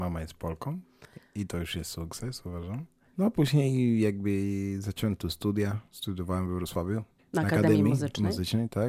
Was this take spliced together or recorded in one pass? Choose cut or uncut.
uncut